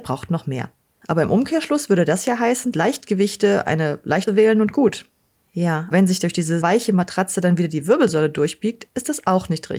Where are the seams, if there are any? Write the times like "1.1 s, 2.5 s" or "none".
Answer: 2.7 s, 4.3 s, 5.9 s, 6.6 s